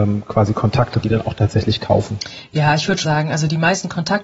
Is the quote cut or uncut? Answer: cut